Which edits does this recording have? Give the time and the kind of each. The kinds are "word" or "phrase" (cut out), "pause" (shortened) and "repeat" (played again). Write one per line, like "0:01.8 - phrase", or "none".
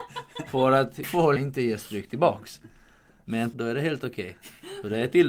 0:01.0 - word
0:01.4 - word
0:03.5 - word